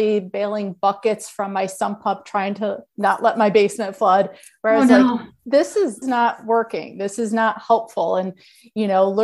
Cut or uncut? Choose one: cut